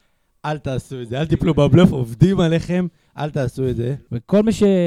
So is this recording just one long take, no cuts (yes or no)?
yes